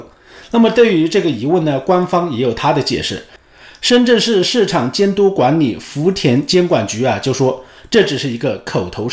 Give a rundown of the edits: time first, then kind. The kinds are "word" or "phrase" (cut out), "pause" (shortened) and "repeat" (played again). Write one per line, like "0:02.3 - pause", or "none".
none